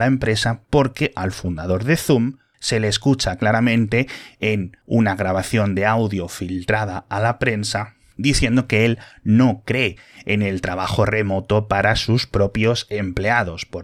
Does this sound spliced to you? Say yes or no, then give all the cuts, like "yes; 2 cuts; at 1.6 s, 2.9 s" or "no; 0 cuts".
no; 0 cuts